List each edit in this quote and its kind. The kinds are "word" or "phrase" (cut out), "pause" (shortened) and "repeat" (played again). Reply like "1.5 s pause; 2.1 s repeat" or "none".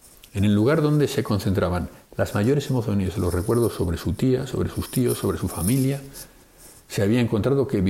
none